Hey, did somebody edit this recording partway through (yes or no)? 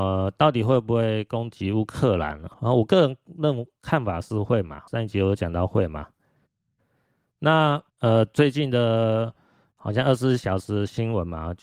yes